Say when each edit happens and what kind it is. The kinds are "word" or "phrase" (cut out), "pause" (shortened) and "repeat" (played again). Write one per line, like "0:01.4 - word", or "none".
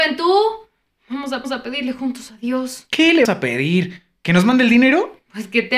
0:01.4 - repeat
0:03.2 - word